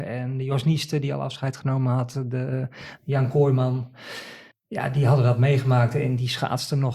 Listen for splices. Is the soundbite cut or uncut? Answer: cut